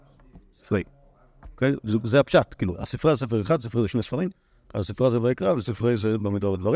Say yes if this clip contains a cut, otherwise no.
no